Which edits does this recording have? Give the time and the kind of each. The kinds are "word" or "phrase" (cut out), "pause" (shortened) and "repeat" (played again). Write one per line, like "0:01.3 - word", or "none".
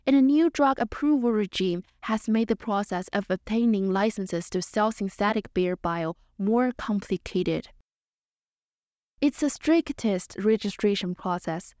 none